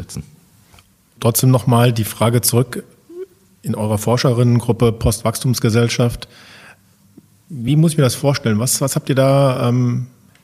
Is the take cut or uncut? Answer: uncut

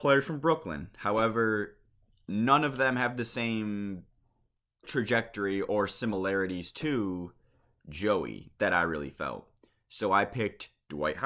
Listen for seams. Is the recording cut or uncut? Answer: uncut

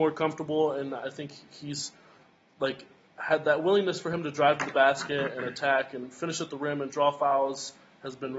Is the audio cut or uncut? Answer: uncut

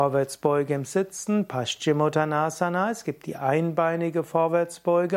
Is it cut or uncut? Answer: uncut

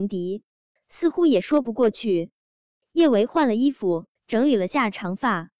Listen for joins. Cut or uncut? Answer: cut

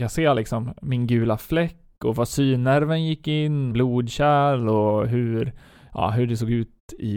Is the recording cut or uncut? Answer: cut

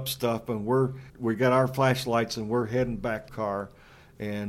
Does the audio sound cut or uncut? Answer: cut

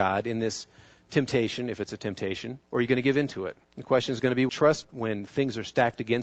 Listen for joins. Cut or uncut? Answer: cut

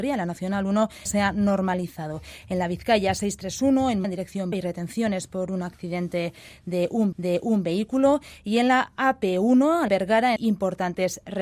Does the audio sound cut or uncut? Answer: cut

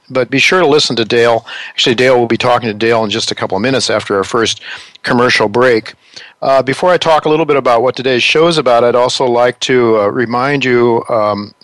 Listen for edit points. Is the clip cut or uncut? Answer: cut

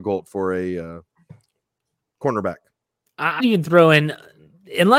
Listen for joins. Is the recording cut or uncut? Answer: cut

